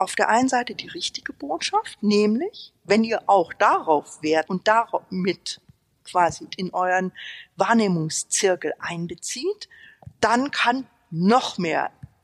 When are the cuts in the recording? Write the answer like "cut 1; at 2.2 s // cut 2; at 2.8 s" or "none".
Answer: cut 1; at 4.5 s // cut 2; at 6.5 s